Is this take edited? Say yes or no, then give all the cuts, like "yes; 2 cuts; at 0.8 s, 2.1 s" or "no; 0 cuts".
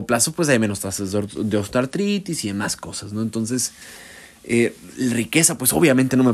no; 0 cuts